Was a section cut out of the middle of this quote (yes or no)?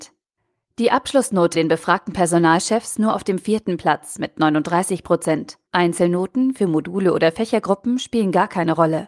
yes